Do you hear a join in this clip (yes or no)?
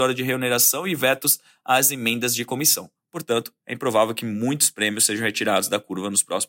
no